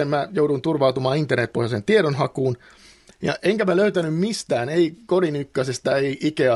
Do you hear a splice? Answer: no; 0 cuts

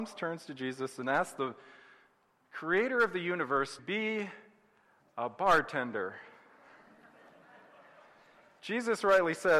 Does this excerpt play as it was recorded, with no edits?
no; 1 cut; at 3.8 s

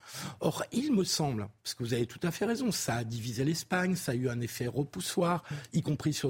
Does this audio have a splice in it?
yes; 1 cut; at 1.6 s

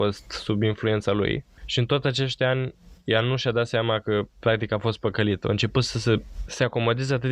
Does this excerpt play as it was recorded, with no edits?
yes; 0 cuts

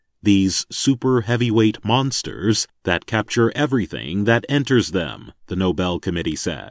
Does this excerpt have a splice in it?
yes; 1 cut; at 5.4 s

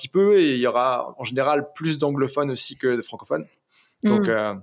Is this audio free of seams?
yes; 0 cuts

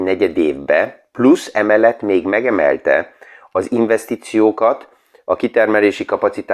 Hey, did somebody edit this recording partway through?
no; 0 cuts

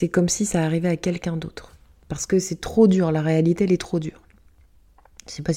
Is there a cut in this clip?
no; 0 cuts

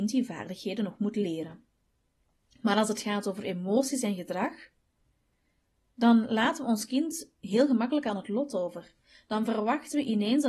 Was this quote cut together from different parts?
no; 0 cuts

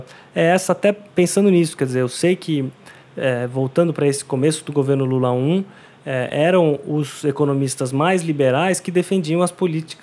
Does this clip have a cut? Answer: no; 0 cuts

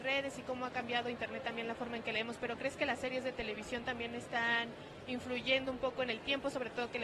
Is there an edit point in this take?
no; 0 cuts

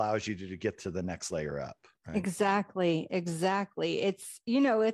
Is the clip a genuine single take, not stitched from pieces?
no; 1 cut; at 1.9 s

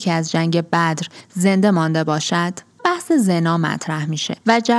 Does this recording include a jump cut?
yes; 1 cut; at 2.8 s

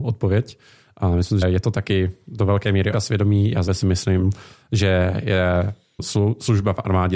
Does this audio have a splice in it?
yes; 4 cuts; at 1.4 s, 2.9 s, 3.7 s, 6.0 s

